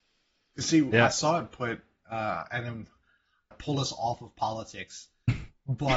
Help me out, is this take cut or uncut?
cut